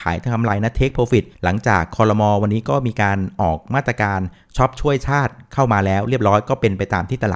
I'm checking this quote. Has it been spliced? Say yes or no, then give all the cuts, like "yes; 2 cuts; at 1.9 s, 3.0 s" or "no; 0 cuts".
yes; 1 cut; at 1.3 s